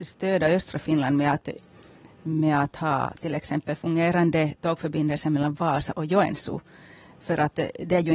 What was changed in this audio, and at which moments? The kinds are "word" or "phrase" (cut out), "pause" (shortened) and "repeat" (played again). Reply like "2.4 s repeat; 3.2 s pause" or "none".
none